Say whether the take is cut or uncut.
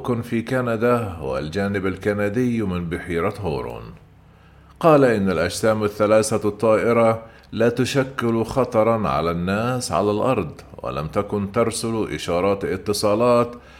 uncut